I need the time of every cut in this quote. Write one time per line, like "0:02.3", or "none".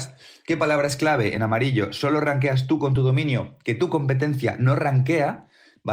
none